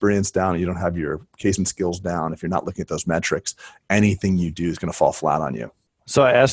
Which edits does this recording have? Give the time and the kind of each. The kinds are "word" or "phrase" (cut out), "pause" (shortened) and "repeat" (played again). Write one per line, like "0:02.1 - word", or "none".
0:01.6 - word